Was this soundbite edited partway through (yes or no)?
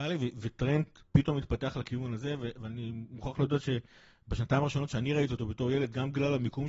yes